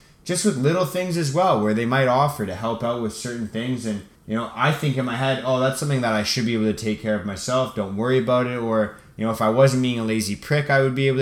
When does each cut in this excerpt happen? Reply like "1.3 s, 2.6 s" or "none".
4.1 s